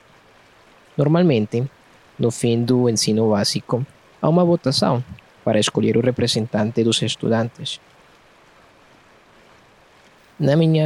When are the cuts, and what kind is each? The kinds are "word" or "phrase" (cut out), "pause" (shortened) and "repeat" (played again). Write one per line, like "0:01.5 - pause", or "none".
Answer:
none